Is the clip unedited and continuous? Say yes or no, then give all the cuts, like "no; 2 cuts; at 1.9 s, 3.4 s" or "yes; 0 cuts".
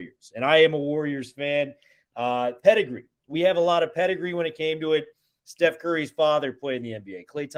yes; 0 cuts